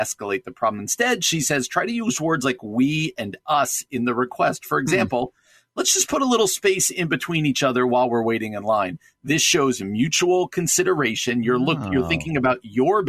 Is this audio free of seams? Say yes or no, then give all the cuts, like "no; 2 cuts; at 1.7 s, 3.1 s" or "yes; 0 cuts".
yes; 0 cuts